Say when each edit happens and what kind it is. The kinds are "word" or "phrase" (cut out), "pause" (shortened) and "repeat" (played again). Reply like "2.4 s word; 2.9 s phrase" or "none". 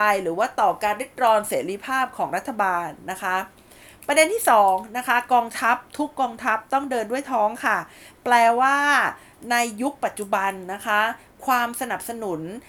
none